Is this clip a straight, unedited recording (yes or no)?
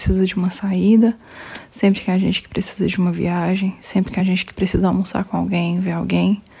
yes